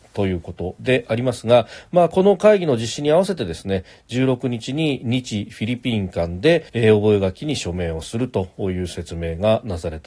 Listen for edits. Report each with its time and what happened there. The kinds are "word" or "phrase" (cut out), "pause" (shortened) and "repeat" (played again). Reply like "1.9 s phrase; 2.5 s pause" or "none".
6.7 s pause